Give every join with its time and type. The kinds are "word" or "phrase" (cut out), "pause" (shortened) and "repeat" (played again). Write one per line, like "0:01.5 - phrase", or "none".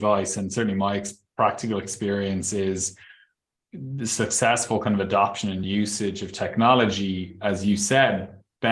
none